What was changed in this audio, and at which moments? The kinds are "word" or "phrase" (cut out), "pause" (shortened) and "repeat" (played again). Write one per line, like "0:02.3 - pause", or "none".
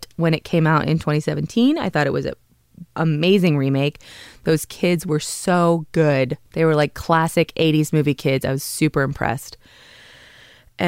0:02.9 - pause
0:06.5 - pause

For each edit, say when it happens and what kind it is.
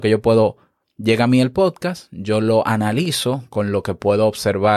none

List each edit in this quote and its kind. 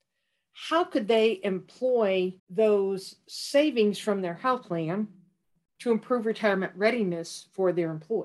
0:02.4 - pause

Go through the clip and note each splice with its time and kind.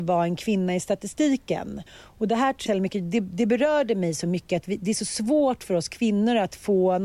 0:01.9 - pause
0:02.7 - phrase

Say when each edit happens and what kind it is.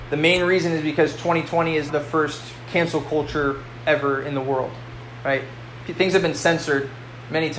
0:01.9 - word

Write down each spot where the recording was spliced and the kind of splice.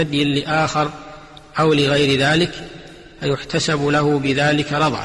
none

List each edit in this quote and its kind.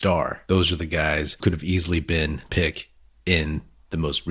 0:01.4 - word
0:02.5 - phrase

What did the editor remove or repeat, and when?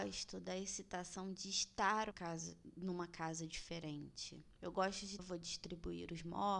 0:02.1 - word
0:05.2 - phrase

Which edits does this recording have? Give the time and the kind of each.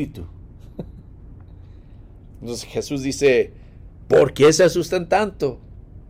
none

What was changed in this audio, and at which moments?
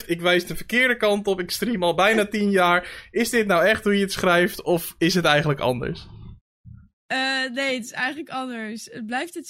none

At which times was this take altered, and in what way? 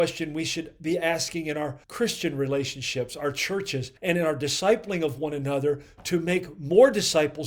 0:01.8 - pause
0:04.0 - pause

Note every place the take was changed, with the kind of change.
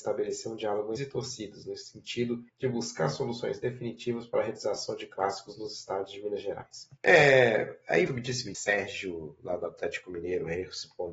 0:01.0 - phrase
0:02.5 - pause
0:07.0 - pause
0:08.1 - word
0:08.5 - phrase

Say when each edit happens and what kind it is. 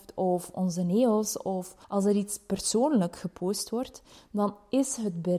0:01.8 - pause

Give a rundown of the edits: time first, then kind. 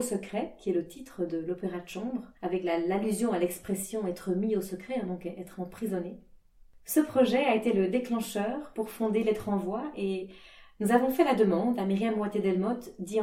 0:02.4 - pause

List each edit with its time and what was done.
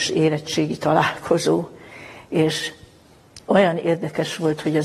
none

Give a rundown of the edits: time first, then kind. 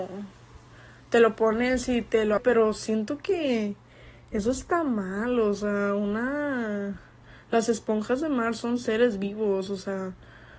0:02.4 - word

